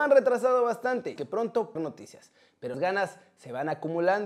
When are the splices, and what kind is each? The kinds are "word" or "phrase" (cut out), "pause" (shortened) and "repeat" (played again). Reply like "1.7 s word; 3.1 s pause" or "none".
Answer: 1.2 s phrase; 1.8 s phrase; 2.7 s word

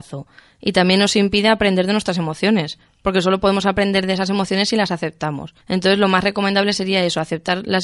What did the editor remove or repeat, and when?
5.6 s pause

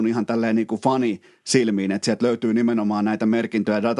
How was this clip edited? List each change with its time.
none

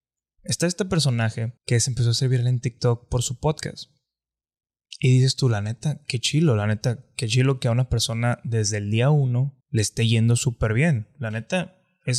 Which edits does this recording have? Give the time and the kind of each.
1.6 s pause; 9.6 s pause

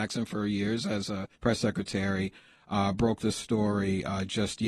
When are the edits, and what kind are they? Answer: 1.3 s pause

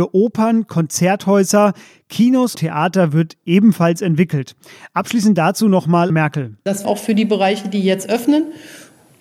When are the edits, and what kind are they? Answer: 2.5 s word; 6.1 s word; 6.8 s phrase

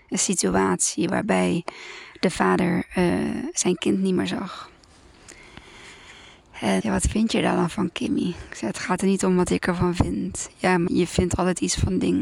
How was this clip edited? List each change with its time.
6.8 s word; 10.9 s word

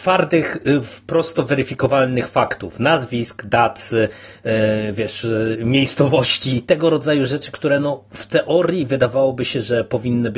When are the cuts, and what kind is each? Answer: none

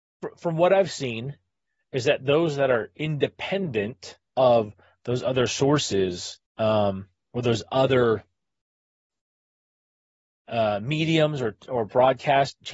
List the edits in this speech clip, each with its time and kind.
4.3 s pause; 6.5 s pause

